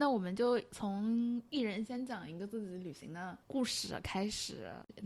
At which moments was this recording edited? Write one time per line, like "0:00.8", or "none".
0:03.4